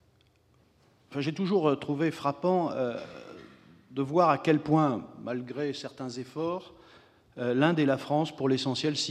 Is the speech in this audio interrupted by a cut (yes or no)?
no